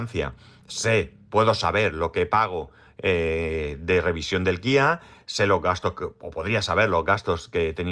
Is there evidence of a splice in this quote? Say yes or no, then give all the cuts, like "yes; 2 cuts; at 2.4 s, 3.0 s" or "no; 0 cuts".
no; 0 cuts